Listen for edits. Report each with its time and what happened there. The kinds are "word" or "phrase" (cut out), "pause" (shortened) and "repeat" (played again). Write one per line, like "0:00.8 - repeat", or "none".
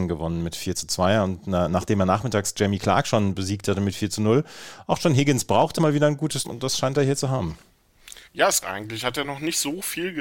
0:05.8 - word
0:06.4 - word
0:08.3 - pause
0:08.6 - word